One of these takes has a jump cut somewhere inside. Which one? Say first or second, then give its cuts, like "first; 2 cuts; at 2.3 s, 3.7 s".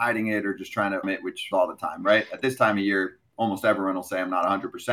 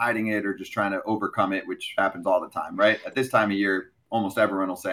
first; 2 cuts; at 1.0 s, 1.5 s